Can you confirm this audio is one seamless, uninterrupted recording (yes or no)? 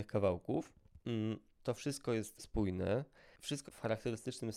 no